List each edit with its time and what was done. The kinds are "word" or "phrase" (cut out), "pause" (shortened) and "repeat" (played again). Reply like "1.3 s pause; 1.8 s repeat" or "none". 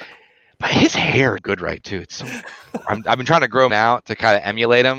1.4 s word; 1.8 s word; 3.7 s word